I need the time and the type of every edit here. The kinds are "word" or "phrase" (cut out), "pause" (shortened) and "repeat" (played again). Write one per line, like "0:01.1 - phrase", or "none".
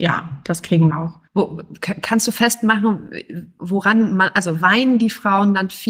0:00.9 - phrase
0:01.3 - pause